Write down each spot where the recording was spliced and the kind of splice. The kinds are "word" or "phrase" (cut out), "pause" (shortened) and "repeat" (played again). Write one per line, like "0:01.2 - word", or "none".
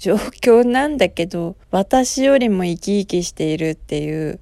0:01.6 - pause